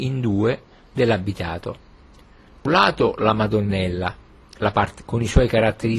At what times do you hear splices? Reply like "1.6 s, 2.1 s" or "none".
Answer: 2.7 s, 5.0 s